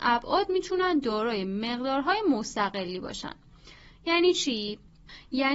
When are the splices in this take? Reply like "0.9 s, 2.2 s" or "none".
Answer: none